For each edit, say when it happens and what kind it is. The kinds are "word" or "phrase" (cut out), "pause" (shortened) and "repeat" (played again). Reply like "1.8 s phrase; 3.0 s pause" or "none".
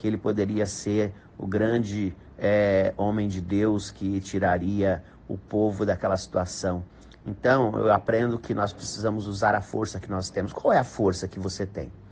none